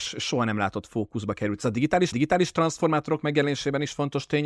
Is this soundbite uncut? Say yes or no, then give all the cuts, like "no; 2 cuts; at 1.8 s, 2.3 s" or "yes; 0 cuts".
no; 1 cut; at 2.1 s